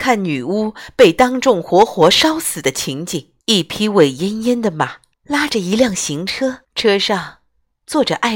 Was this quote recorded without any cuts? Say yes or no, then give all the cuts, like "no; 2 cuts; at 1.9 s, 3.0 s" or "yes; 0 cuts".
no; 3 cuts; at 3.4 s, 5.1 s, 6.6 s